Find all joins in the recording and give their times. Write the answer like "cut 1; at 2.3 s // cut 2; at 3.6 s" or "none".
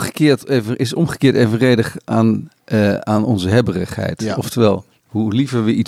none